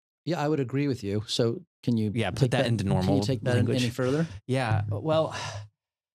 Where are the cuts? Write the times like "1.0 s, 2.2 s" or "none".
none